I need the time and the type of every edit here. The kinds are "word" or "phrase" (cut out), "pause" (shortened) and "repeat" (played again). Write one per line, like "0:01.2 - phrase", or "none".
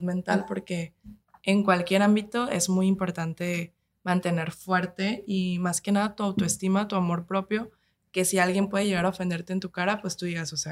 none